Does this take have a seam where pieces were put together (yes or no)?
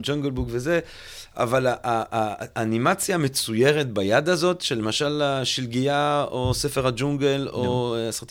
no